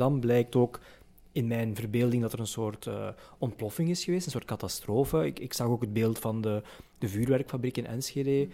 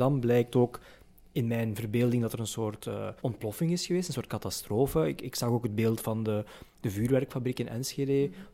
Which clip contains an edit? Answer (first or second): second